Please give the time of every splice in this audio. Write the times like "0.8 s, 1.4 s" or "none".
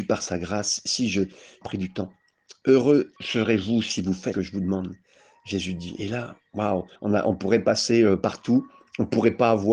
1.6 s, 3.2 s, 4.3 s, 7.0 s